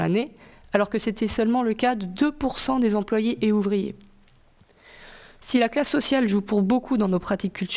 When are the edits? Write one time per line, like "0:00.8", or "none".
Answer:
none